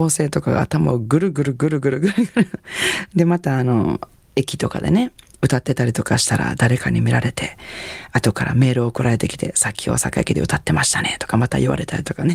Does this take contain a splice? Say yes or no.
no